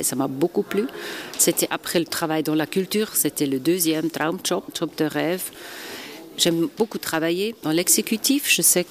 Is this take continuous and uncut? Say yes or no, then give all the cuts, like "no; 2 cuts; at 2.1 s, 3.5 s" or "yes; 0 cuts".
no; 1 cut; at 4.7 s